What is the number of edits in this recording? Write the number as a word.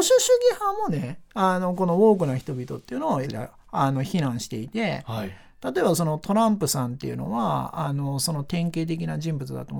one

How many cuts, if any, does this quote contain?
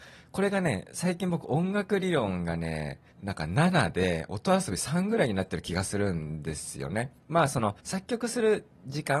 three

